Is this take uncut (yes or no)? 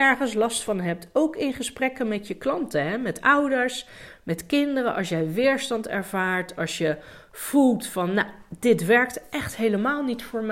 yes